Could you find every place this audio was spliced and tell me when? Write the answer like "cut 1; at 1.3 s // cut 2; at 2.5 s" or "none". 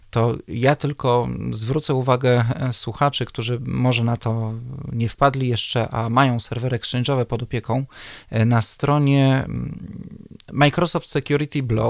none